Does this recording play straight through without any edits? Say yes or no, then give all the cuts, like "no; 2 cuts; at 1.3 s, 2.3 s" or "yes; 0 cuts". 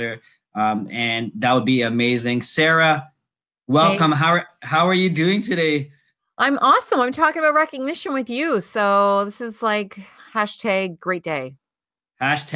yes; 0 cuts